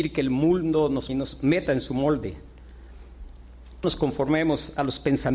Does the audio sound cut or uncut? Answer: cut